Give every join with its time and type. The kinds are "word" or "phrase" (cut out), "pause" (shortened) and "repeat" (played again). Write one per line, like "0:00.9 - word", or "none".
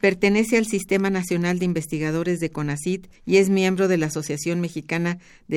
0:03.2 - pause